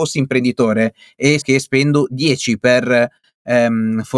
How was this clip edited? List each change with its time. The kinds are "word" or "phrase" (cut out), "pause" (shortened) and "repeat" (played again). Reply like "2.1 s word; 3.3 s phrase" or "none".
1.4 s word